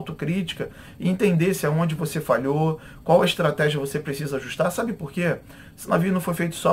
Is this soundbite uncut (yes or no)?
yes